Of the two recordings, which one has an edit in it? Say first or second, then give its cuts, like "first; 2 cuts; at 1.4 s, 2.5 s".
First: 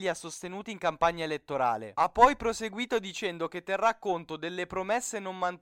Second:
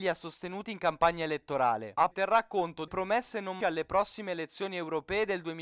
second; 3 cuts; at 2.1 s, 2.9 s, 3.6 s